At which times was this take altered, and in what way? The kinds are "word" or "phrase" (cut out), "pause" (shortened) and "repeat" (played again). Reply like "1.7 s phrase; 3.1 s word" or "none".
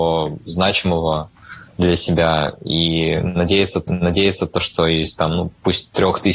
1.7 s pause; 3.9 s repeat; 5.2 s word